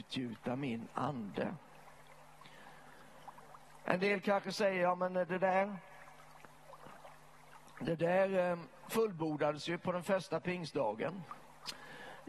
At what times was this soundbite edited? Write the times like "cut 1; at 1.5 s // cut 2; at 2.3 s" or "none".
none